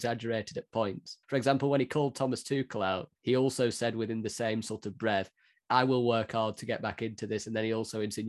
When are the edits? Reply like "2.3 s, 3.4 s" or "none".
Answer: 1.2 s, 3.2 s